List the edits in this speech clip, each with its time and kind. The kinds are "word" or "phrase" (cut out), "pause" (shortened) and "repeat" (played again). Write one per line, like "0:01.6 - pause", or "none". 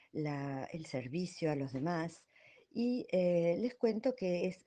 none